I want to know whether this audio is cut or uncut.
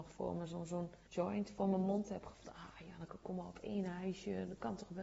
cut